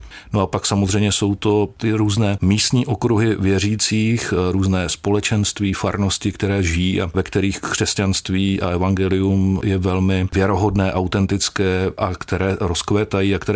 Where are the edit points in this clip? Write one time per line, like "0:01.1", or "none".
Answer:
none